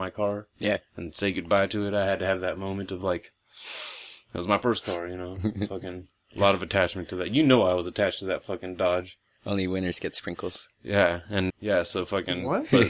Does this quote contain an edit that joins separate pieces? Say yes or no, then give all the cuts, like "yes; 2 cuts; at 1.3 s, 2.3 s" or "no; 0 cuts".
yes; 1 cut; at 11.5 s